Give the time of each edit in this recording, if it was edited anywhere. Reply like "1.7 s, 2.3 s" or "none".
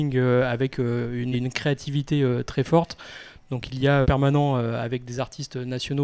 1.3 s, 4.0 s